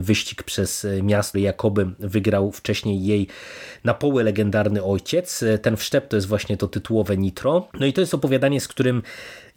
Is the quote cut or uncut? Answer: cut